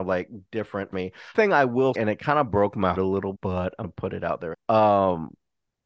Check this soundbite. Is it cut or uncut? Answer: cut